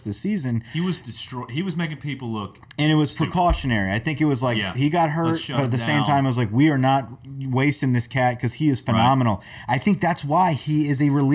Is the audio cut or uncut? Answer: uncut